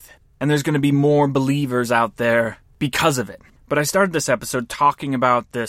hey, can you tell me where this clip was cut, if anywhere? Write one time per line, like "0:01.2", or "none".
none